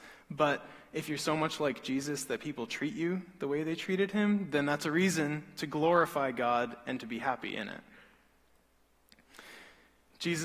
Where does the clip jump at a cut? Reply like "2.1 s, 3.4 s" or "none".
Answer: none